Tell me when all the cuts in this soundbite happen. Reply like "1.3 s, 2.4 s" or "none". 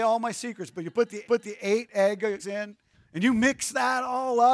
1.2 s, 2.4 s, 2.9 s